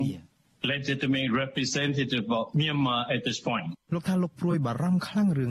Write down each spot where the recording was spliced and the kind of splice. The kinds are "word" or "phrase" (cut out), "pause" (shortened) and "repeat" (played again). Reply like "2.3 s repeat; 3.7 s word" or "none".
3.8 s pause